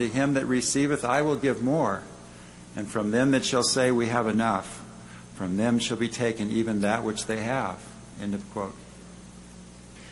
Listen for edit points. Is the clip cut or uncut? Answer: uncut